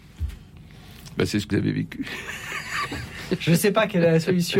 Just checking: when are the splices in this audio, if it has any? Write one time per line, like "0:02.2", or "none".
0:01.5